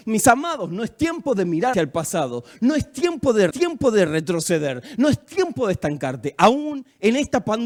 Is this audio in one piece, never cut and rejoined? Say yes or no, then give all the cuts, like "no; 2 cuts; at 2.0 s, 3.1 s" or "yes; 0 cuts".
no; 2 cuts; at 1.7 s, 3.5 s